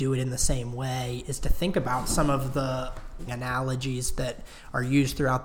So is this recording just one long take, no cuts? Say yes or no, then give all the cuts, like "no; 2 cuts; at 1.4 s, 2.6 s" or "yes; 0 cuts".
no; 1 cut; at 3.3 s